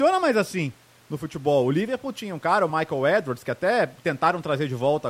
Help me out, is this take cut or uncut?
uncut